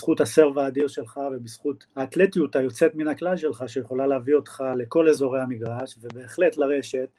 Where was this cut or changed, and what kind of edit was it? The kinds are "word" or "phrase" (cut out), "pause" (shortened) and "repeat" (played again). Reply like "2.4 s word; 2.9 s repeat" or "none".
1.9 s pause